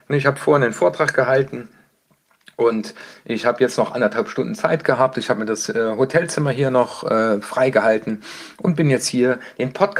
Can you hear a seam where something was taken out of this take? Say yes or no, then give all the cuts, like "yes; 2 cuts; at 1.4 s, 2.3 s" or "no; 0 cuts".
no; 0 cuts